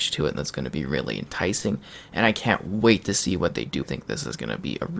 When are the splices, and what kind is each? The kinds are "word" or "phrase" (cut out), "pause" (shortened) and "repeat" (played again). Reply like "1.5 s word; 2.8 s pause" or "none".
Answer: 3.8 s phrase